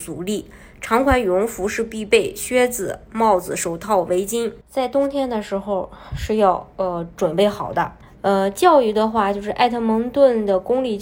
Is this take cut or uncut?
cut